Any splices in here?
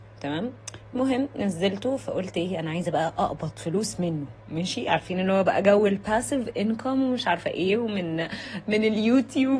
no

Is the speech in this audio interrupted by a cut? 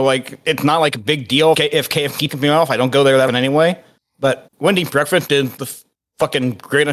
yes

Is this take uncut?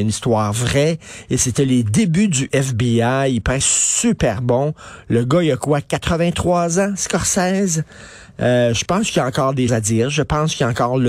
no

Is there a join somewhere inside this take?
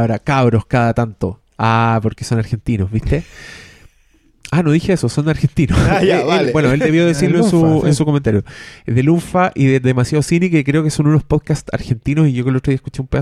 no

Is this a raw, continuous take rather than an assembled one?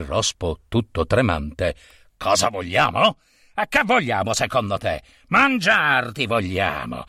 yes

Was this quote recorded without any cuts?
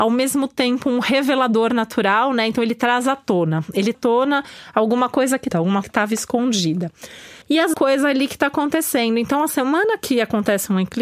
no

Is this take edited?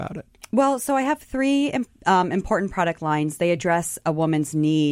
no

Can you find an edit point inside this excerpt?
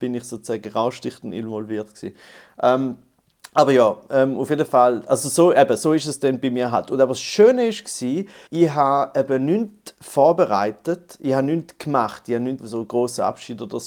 yes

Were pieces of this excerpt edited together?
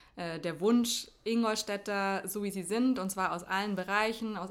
no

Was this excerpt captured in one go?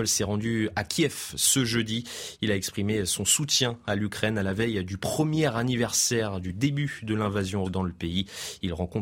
no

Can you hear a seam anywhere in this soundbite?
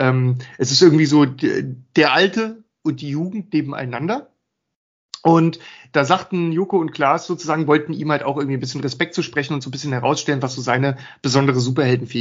no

